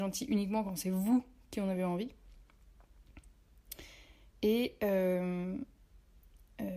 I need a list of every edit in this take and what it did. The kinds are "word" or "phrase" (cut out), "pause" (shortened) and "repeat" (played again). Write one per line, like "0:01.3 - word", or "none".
none